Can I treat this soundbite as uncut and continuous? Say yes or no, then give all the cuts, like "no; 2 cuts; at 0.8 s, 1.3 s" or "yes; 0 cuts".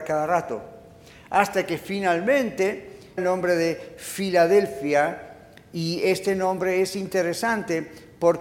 no; 1 cut; at 3.2 s